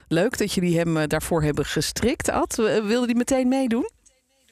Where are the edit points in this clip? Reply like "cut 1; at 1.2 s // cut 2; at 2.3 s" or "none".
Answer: none